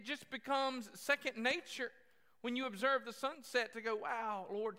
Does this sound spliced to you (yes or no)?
no